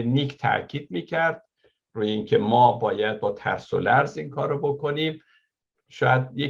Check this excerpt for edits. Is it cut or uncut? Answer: uncut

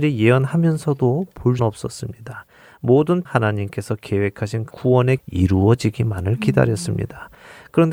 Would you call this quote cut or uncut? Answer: cut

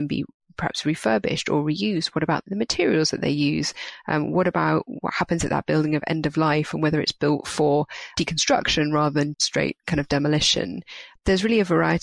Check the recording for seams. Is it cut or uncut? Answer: cut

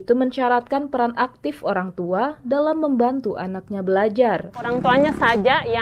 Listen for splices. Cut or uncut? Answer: uncut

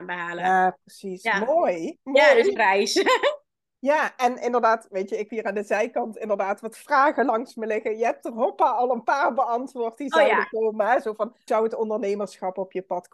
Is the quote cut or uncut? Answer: cut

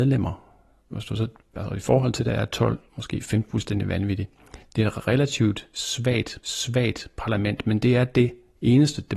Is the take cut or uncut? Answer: cut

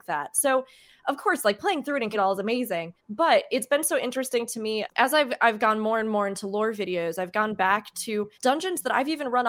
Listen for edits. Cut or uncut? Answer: cut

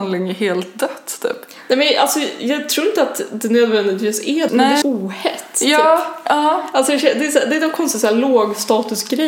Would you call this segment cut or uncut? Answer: cut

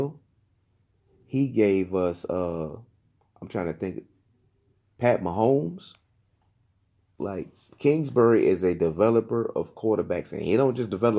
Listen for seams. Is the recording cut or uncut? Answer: uncut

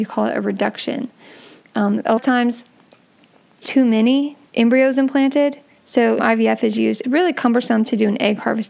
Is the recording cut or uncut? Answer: cut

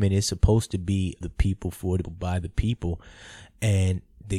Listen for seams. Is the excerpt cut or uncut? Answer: cut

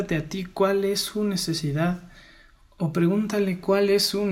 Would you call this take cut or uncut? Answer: uncut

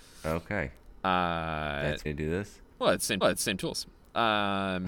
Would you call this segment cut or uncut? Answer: cut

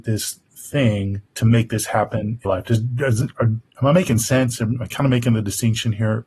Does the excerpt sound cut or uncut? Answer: cut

